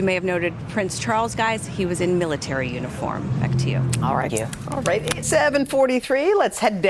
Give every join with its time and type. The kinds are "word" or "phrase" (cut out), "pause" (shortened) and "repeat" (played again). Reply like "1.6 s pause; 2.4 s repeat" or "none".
4.3 s phrase; 5.2 s word

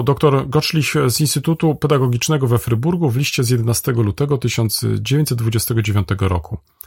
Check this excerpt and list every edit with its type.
none

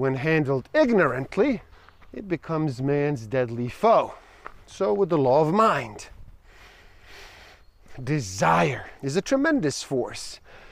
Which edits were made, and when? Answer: 1.7 s pause; 9.0 s pause

